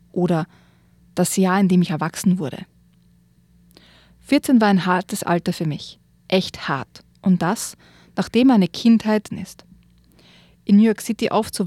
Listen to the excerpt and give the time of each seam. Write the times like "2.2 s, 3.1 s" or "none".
9.3 s